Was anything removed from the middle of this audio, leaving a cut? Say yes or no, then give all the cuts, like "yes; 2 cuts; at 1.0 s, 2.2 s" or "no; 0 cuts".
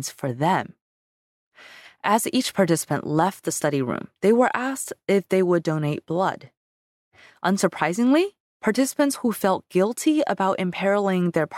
no; 0 cuts